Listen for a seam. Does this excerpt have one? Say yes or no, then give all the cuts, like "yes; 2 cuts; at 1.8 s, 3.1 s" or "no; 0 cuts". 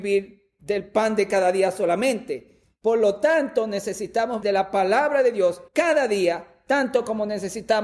yes; 2 cuts; at 4.4 s, 5.7 s